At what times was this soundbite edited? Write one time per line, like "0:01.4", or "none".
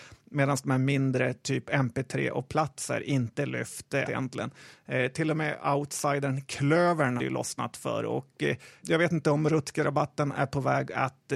0:04.1
0:07.2
0:08.8